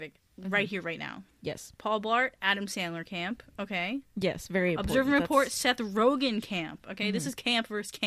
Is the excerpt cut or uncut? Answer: cut